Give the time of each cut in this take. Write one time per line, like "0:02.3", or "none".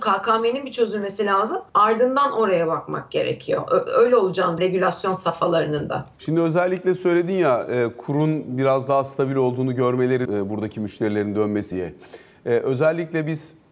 0:01.7
0:04.6
0:06.1
0:10.3
0:11.7